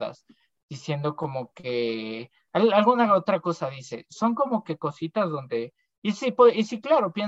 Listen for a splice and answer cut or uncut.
uncut